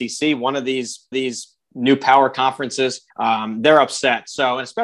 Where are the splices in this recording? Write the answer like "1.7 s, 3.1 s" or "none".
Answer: 1.1 s, 3.1 s